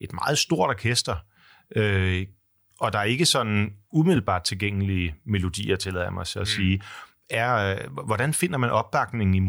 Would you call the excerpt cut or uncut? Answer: uncut